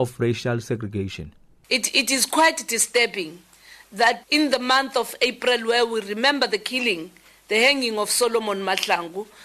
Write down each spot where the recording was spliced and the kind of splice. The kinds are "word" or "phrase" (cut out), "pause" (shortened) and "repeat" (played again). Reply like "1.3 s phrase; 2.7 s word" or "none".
4.2 s word